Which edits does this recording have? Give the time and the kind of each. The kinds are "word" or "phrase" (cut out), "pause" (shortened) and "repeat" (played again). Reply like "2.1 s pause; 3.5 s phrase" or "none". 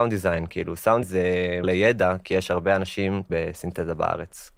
1.0 s word; 1.6 s word; 3.3 s word